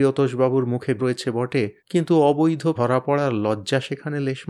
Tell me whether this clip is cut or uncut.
cut